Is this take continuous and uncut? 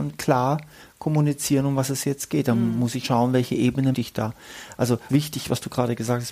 no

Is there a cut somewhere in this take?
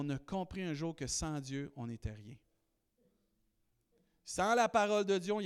no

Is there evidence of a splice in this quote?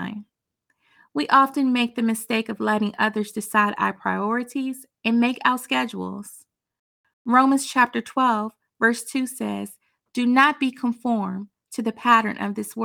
no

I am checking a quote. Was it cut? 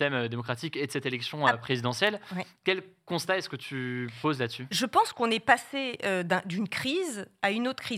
no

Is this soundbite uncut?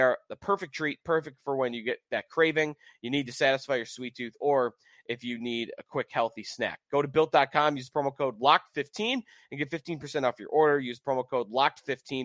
yes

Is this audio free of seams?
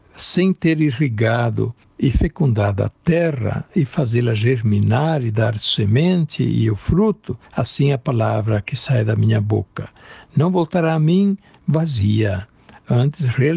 no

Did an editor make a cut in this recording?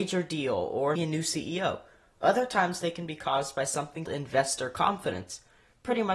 yes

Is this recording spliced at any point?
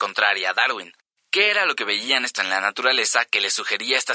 yes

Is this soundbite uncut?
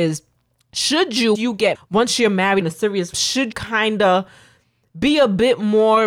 no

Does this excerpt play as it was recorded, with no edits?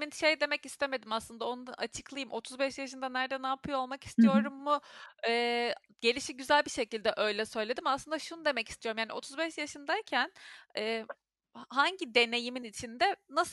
yes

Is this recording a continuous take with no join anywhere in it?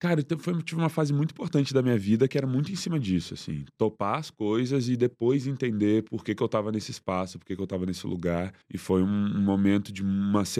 no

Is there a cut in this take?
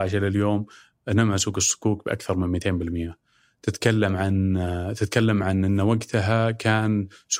no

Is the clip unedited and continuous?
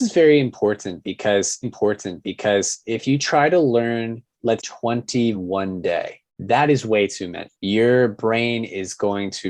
no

